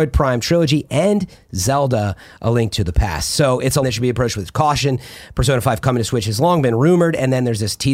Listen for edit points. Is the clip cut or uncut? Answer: cut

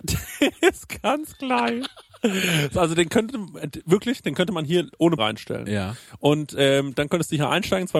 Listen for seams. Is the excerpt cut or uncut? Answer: cut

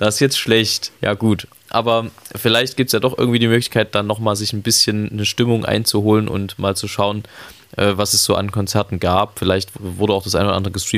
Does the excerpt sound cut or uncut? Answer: cut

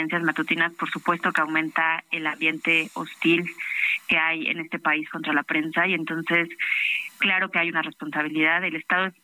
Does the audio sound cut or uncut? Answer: uncut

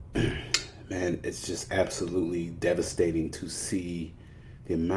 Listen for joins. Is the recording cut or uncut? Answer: uncut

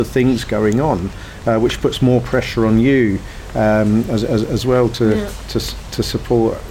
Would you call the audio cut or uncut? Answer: uncut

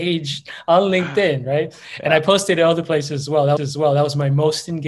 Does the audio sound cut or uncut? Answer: cut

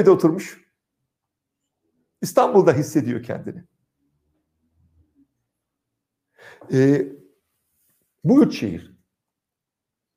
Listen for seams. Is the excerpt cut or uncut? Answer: uncut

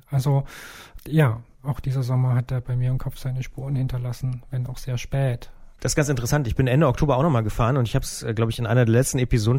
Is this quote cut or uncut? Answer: uncut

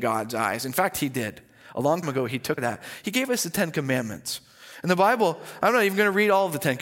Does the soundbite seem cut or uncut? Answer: cut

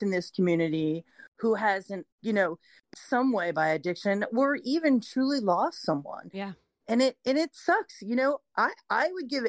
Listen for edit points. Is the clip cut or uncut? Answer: cut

